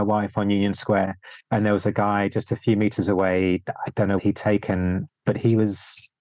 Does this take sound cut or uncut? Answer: cut